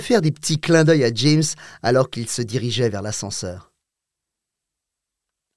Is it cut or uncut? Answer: uncut